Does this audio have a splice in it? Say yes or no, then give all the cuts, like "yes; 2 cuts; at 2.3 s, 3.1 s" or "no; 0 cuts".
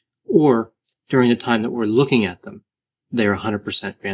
no; 0 cuts